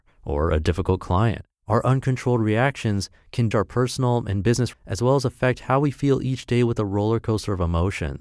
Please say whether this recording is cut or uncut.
cut